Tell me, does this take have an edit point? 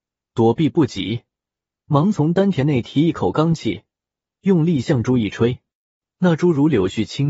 no; 0 cuts

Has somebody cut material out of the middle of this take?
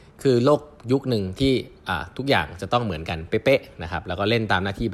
no; 0 cuts

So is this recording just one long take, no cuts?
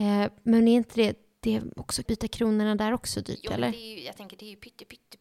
no; 1 cut; at 2.1 s

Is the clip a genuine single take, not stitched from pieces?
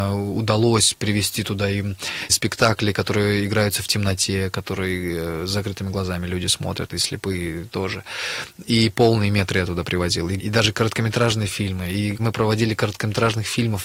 no; 4 cuts; at 2.3 s, 7.7 s, 10.4 s, 12.2 s

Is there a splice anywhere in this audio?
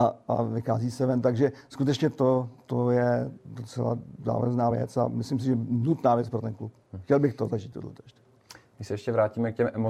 no; 0 cuts

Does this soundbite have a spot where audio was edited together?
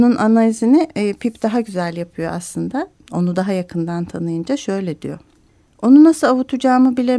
yes; 1 cut; at 5.5 s

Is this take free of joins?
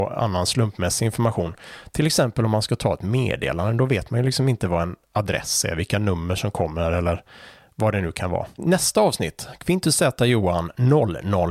yes; 0 cuts

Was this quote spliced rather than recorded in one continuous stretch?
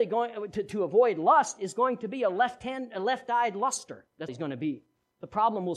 yes; 1 cut; at 4.3 s

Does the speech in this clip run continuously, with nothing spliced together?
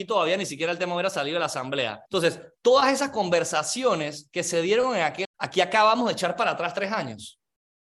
no; 2 cuts; at 2.1 s, 5.2 s

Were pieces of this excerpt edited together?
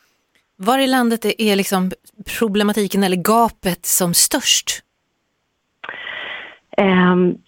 no; 0 cuts

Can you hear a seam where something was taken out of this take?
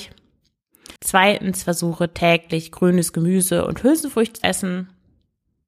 yes; 2 cuts; at 1.0 s, 4.4 s

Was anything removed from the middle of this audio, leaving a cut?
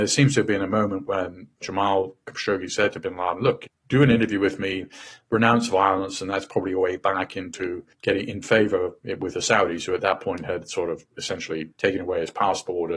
yes; 3 cuts; at 3.8 s, 7.9 s, 11.7 s

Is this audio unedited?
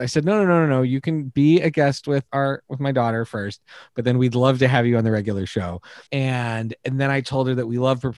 no; 2 cuts; at 2.3 s, 6.1 s

